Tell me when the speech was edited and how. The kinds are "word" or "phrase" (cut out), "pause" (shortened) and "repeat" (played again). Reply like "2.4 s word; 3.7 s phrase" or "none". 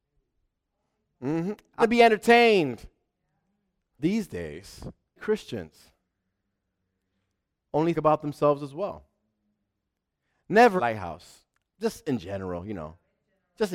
1.8 s word; 4.0 s word; 5.2 s word; 7.9 s word; 10.8 s word